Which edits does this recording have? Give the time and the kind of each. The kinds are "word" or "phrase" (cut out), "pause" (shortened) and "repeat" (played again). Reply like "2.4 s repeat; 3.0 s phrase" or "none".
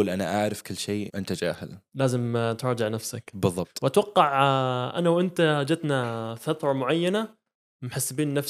1.1 s word